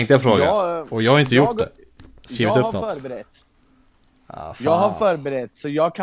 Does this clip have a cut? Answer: no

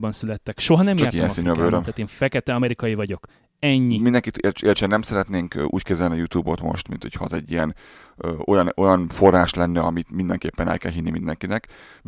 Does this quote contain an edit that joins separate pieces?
no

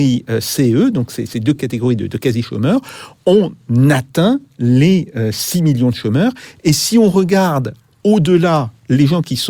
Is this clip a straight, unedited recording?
yes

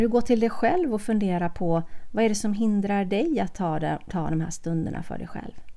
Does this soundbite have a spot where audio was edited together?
no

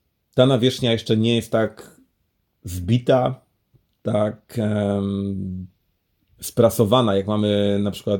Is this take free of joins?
yes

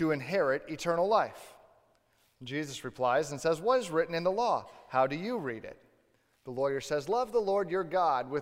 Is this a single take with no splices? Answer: yes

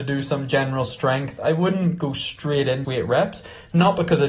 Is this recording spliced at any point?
yes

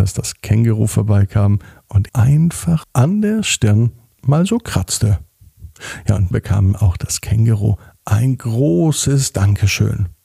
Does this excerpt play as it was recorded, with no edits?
no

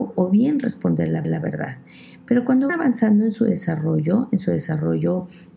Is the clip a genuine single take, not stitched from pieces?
no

